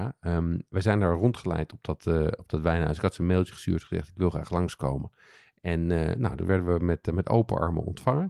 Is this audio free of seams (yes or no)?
yes